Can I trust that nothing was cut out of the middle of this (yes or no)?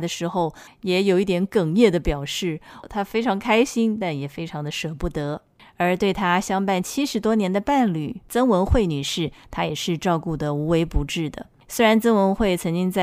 yes